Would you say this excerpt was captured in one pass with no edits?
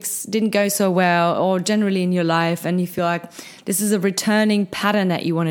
yes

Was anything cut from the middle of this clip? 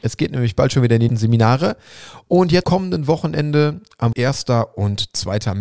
yes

